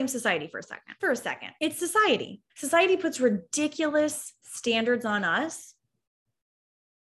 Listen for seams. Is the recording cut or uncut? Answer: cut